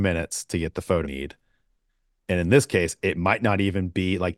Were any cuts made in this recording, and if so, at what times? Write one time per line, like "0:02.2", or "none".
0:01.0